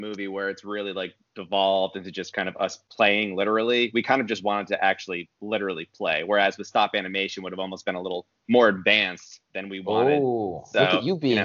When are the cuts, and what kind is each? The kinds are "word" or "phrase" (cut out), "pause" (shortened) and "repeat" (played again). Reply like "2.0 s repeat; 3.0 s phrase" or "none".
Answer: none